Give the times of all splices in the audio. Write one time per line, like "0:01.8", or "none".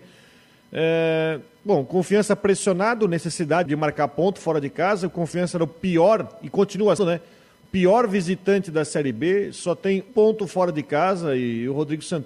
0:03.7
0:07.0
0:10.1